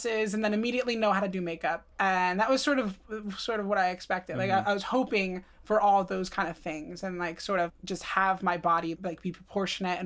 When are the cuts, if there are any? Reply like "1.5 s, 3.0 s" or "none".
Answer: 1.9 s